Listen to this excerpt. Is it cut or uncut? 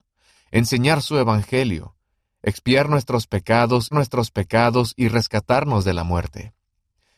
cut